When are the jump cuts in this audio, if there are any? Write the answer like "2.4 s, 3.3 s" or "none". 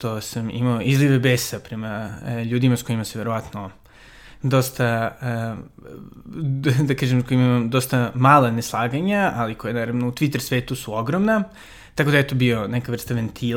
none